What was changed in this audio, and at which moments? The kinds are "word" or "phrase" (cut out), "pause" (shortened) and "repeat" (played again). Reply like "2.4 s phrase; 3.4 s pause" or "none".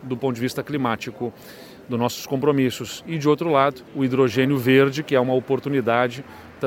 3.9 s pause

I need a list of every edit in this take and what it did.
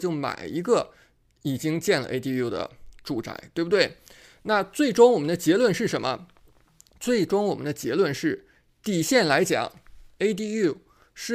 none

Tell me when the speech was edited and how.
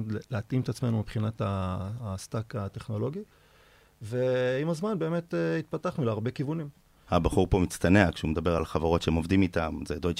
none

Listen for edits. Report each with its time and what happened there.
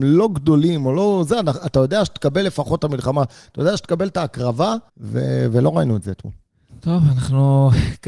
4.9 s pause

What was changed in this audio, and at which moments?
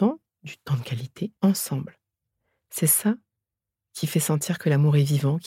1.4 s pause

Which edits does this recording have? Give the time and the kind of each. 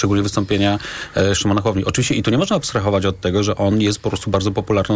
none

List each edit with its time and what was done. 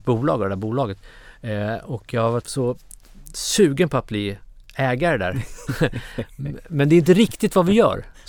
2.4 s word

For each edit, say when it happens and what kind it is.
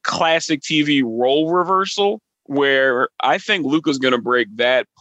2.3 s pause

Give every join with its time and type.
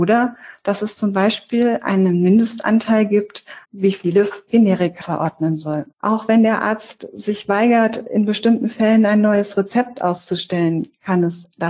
3.6 s pause; 5.0 s word; 5.9 s pause

